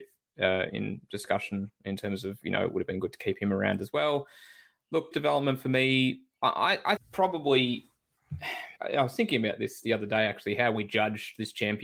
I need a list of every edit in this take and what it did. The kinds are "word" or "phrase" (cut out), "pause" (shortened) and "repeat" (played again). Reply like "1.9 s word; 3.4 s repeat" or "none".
5.1 s word; 7.0 s word; 8.8 s pause